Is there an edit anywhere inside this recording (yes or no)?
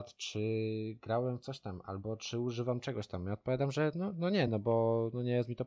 no